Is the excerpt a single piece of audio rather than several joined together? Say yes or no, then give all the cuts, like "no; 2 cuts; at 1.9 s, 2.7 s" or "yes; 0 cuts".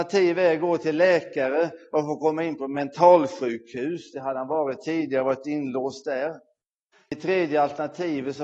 yes; 0 cuts